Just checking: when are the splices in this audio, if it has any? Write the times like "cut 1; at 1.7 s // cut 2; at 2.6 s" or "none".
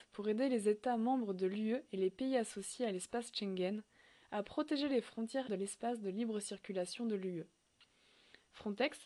cut 1; at 5.5 s